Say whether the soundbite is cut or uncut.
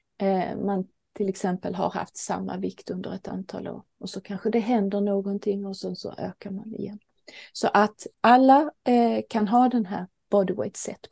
uncut